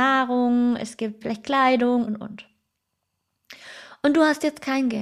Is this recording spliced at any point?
yes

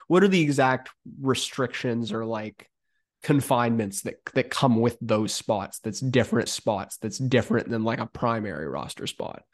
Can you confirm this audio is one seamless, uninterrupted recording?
no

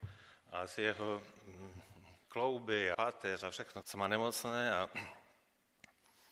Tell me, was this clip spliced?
yes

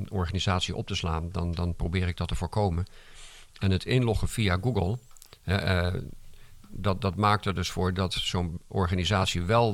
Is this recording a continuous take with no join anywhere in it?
yes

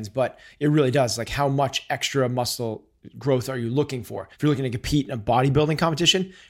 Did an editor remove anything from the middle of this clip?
yes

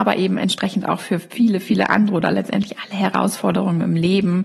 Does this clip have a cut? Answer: no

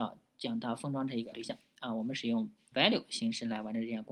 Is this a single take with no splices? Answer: no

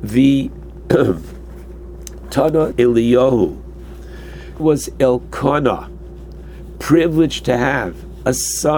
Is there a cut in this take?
yes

